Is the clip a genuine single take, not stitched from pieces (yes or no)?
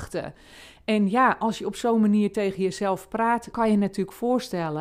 no